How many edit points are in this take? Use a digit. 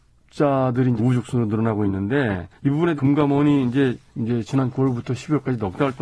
4